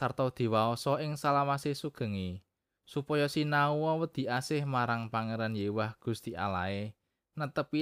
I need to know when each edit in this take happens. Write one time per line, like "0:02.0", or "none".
none